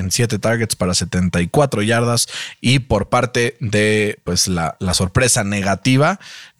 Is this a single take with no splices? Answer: yes; 0 cuts

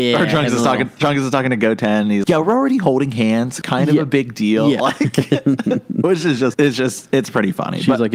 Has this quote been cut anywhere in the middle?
yes; 3 cuts; at 2.2 s, 3.6 s, 6.5 s

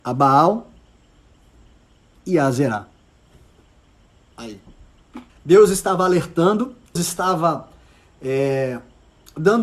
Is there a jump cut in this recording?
yes; 2 cuts; at 5.3 s, 7.0 s

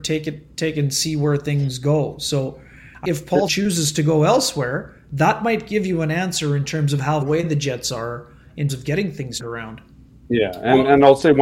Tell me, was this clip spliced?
yes; 5 cuts; at 3.0 s, 3.5 s, 7.2 s, 8.7 s, 9.4 s

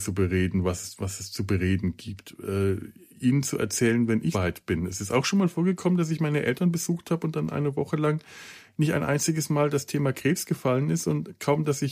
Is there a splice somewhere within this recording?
yes; 1 cut; at 4.3 s

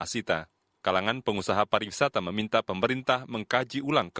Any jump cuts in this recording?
no; 0 cuts

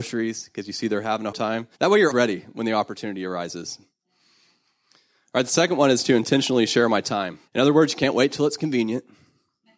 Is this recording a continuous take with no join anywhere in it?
no; 4 cuts; at 1.3 s, 1.7 s, 2.1 s, 7.5 s

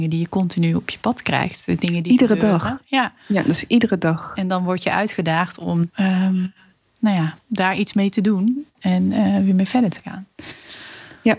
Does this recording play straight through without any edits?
no; 2 cuts; at 5.9 s, 7.4 s

